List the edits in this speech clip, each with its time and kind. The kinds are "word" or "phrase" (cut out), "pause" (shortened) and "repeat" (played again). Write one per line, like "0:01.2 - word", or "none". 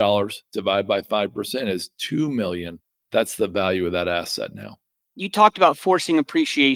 none